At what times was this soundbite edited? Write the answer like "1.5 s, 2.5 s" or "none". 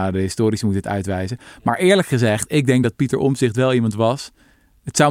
none